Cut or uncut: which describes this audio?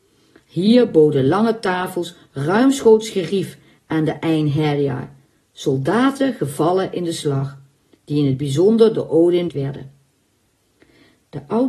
cut